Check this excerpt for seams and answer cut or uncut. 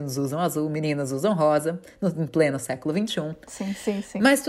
uncut